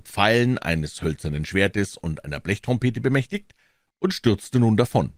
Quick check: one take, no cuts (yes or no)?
yes